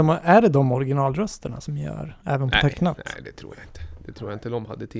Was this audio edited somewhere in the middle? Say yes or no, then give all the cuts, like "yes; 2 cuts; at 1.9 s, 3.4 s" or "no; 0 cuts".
no; 0 cuts